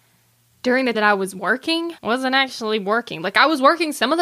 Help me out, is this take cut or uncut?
cut